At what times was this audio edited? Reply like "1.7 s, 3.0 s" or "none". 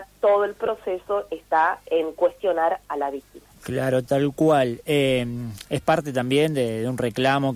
3.5 s

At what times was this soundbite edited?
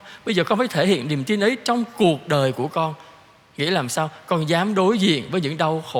none

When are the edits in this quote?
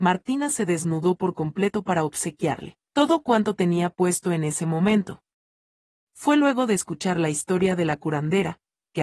none

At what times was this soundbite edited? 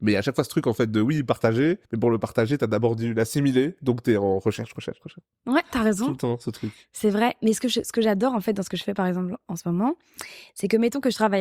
1.8 s

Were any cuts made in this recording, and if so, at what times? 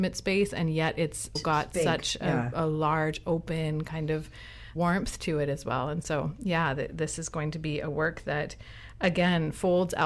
1.4 s, 4.8 s

